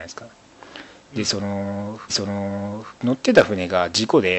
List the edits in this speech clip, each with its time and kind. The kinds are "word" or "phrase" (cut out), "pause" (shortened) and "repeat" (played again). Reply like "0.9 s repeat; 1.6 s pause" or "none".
2.1 s repeat